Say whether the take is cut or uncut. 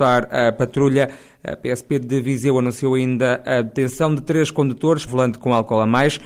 cut